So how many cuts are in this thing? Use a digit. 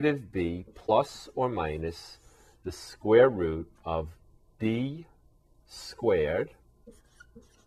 1